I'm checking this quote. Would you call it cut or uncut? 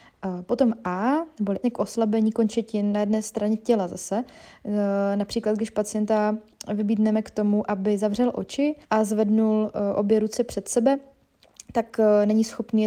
cut